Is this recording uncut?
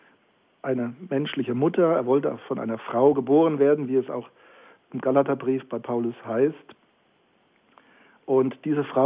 yes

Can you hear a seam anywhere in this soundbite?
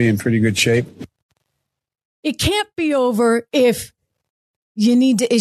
no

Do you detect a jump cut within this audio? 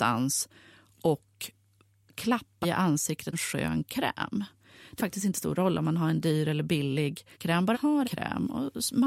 yes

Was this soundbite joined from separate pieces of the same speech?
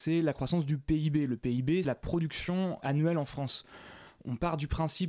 yes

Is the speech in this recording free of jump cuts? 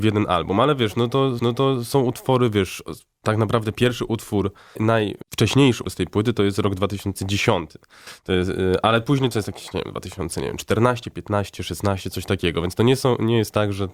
no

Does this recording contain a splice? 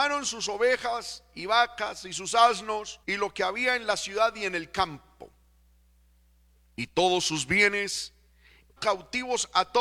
yes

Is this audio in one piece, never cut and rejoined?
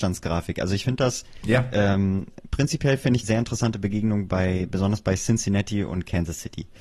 no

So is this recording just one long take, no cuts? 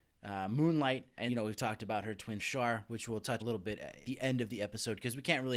no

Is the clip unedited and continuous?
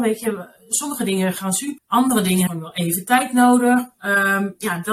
no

